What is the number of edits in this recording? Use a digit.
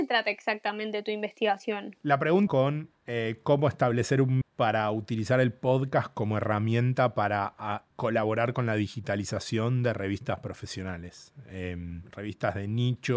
3